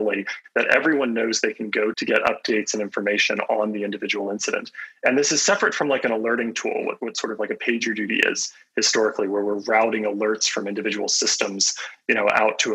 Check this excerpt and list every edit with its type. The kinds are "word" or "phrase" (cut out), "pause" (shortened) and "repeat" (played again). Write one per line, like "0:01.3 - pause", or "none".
0:01.9 - word